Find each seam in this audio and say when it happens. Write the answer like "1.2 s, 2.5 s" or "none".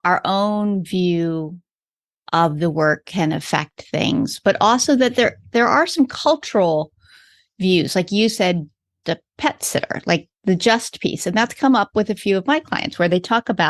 9.0 s